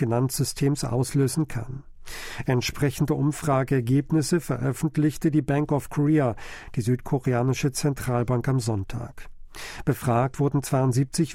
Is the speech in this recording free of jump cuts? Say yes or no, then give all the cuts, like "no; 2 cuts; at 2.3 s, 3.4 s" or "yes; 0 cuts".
yes; 0 cuts